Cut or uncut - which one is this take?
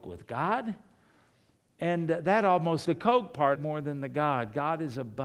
cut